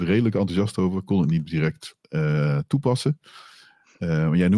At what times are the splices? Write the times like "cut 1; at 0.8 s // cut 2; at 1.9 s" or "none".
cut 1; at 2.0 s